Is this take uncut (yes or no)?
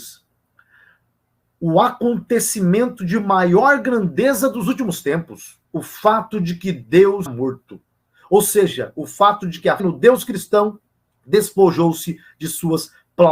no